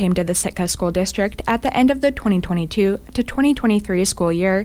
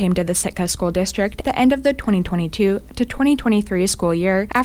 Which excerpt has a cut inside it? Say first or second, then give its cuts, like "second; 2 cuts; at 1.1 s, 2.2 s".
second; 1 cut; at 1.4 s